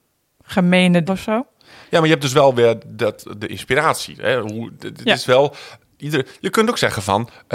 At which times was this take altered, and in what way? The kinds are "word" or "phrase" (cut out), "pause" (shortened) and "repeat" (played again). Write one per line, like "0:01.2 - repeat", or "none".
0:01.1 - word

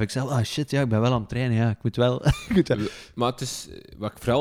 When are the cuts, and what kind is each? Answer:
none

